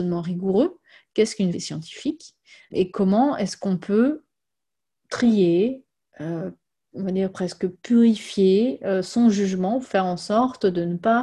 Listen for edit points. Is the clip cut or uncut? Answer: cut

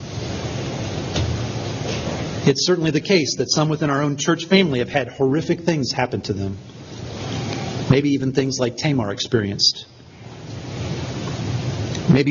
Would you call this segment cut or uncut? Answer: uncut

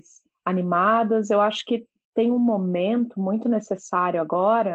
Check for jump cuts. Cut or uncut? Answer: uncut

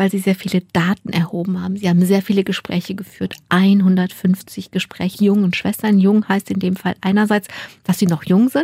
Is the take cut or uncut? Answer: cut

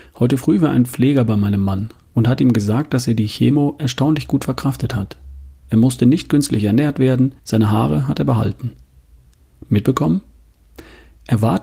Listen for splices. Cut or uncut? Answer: cut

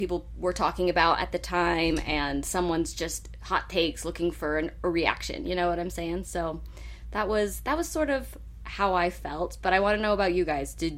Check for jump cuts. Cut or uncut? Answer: uncut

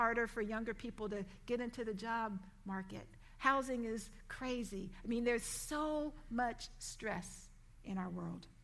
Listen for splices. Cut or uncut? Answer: uncut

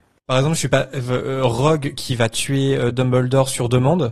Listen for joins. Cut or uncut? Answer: uncut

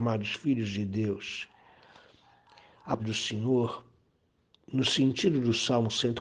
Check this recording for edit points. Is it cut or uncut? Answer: cut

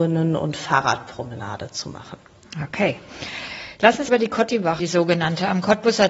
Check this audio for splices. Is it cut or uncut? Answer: cut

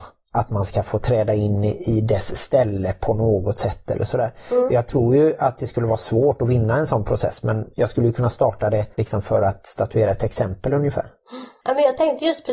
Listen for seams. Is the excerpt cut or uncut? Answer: cut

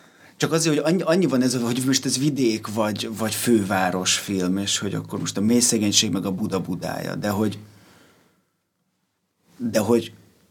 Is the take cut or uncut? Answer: uncut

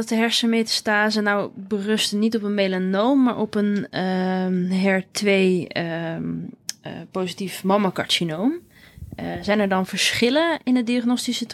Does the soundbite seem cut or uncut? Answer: uncut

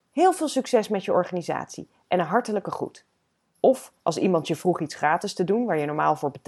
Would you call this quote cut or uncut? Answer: cut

